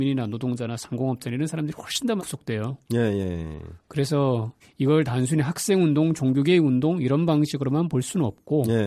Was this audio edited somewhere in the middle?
yes; 2 cuts; at 2.2 s, 4.6 s

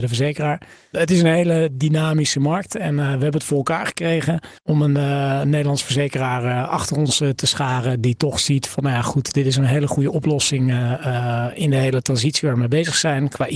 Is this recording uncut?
no; 1 cut; at 4.6 s

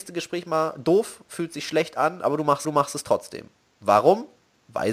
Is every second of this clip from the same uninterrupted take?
no; 1 cut; at 2.6 s

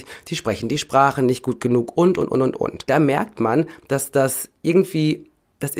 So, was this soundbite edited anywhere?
no; 0 cuts

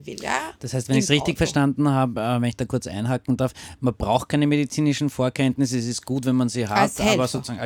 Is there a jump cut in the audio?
no; 0 cuts

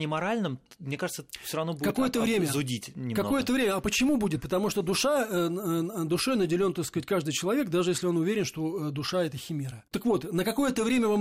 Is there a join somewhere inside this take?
yes; 1 cut; at 9.9 s

